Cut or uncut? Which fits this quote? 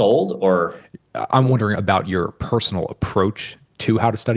uncut